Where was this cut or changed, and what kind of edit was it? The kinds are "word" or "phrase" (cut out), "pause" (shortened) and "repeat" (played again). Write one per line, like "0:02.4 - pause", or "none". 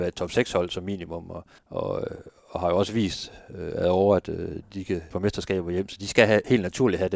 0:01.6 - pause
0:05.1 - word